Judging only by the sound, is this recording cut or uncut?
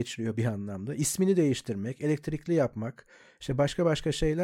uncut